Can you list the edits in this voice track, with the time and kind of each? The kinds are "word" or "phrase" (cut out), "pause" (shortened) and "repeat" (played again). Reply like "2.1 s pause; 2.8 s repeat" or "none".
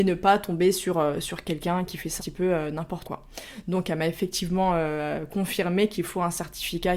2.2 s word; 3.0 s word